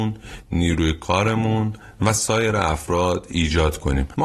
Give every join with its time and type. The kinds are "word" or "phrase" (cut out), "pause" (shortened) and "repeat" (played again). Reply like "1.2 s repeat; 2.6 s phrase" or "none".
none